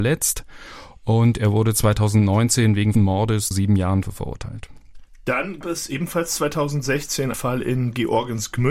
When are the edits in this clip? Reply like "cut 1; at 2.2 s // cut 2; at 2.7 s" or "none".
cut 1; at 2.9 s // cut 2; at 3.5 s // cut 3; at 4.0 s // cut 4; at 5.6 s // cut 5; at 7.3 s